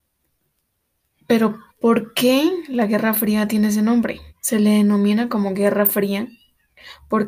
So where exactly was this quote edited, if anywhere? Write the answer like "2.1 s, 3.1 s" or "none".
1.7 s, 4.3 s